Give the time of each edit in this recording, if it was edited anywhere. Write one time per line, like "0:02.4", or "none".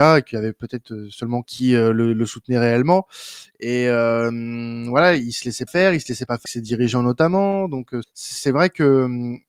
0:01.4
0:05.7
0:06.5
0:08.0